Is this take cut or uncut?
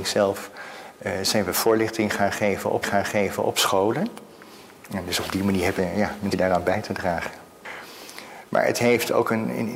cut